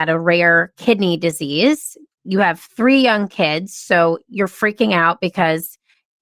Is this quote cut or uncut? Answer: uncut